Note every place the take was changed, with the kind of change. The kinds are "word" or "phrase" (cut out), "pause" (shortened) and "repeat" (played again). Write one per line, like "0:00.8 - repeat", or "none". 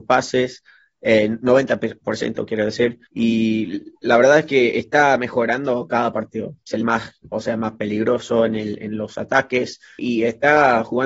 0:03.1 - pause
0:06.8 - word
0:07.3 - word
0:10.0 - word